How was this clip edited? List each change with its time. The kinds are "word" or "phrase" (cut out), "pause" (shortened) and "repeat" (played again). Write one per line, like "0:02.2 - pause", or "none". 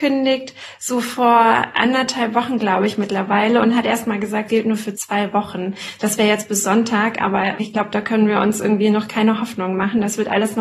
0:04.5 - word